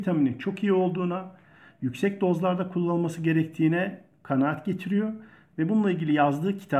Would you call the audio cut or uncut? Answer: uncut